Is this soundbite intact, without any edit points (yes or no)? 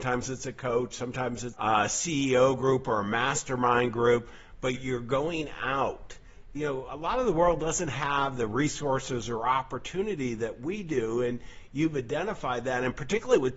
no